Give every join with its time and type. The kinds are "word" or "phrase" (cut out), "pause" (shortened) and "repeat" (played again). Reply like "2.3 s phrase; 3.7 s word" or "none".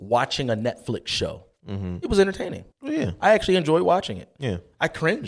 2.7 s pause